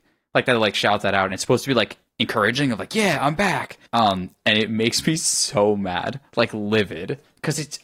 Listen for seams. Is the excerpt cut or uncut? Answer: cut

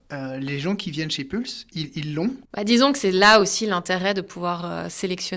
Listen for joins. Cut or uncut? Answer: uncut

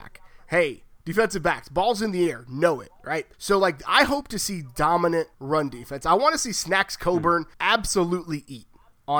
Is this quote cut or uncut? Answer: cut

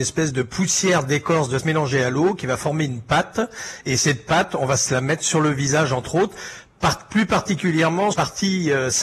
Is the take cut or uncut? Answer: cut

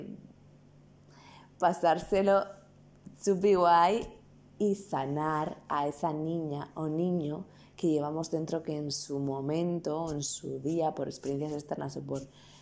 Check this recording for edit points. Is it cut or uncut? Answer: uncut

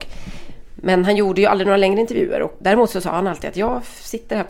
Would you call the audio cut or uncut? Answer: cut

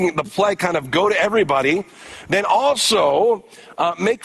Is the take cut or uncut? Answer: uncut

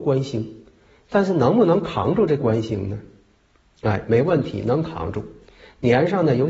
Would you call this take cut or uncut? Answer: uncut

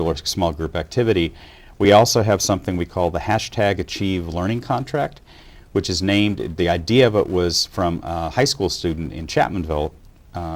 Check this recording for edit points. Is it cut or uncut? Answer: uncut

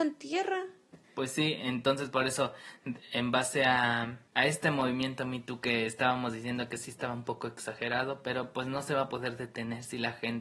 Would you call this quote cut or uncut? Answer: cut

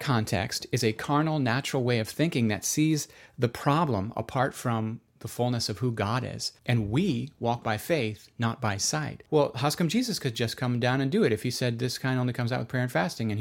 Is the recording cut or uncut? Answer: uncut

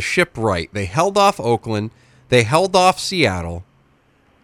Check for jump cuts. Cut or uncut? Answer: uncut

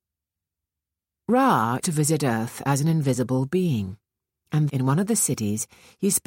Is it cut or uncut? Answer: cut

